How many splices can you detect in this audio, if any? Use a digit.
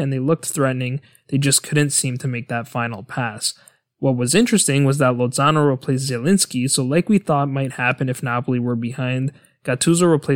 0